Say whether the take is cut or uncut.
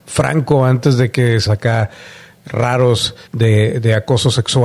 cut